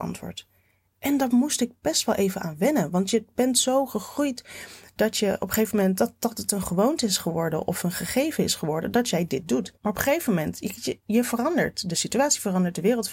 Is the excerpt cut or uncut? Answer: cut